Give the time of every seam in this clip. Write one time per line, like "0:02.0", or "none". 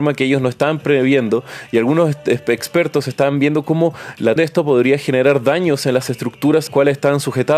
0:04.4
0:06.7